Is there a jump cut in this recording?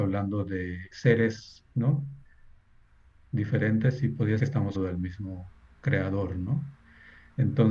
yes; 3 cuts; at 0.9 s, 4.4 s, 4.7 s

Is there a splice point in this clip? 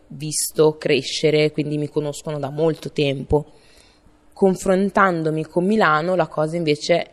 no; 0 cuts

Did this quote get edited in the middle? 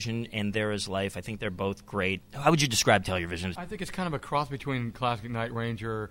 no; 0 cuts

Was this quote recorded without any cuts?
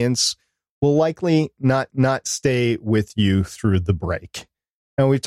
no; 1 cut; at 1.9 s

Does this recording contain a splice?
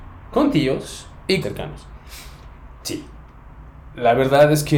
yes; 2 cuts; at 1.4 s, 2.8 s

